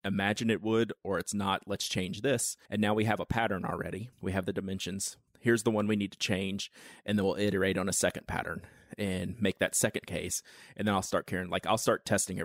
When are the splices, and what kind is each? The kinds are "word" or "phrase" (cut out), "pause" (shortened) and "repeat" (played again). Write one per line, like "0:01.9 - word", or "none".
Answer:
0:02.7 - pause
0:04.1 - pause
0:05.3 - pause